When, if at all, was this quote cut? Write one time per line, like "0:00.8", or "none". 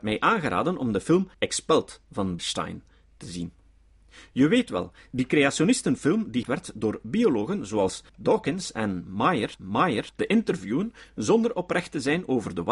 0:01.3
0:02.4
0:06.4
0:08.1
0:09.6